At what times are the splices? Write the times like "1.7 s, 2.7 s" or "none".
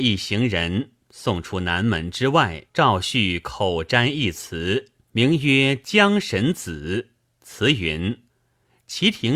2.7 s, 5.0 s, 8.3 s